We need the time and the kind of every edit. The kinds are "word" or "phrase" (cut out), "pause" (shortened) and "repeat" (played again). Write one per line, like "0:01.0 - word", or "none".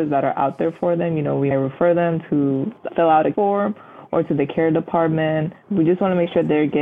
0:01.5 - word
0:02.9 - word
0:03.3 - word